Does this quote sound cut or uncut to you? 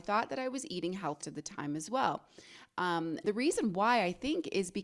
cut